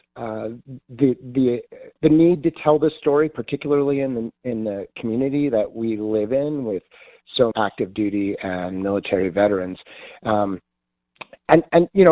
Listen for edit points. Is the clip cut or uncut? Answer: cut